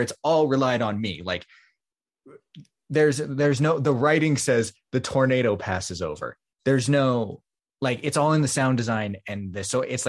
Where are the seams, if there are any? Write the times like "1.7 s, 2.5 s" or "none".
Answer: none